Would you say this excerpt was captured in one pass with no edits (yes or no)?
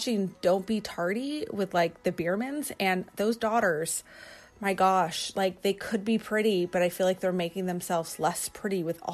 yes